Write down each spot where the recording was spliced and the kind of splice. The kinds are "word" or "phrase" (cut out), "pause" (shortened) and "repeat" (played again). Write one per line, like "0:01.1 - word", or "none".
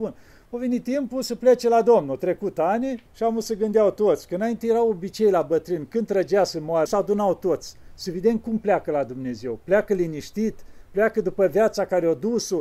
0:03.1 - pause
0:06.9 - word